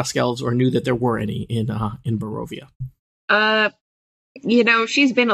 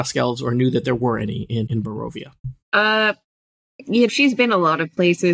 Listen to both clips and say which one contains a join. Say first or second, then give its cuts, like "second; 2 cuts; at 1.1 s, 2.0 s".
second; 3 cuts; at 1.7 s, 2.6 s, 4.1 s